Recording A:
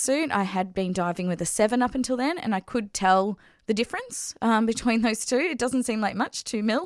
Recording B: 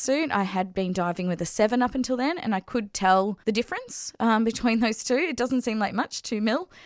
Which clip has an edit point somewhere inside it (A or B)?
B